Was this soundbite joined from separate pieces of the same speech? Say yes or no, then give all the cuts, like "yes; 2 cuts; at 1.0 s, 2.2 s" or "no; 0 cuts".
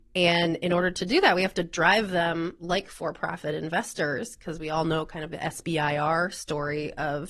no; 0 cuts